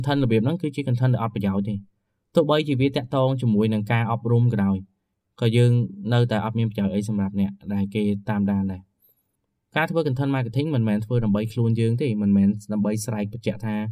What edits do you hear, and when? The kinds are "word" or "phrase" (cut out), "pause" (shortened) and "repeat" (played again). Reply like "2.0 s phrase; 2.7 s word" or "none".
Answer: none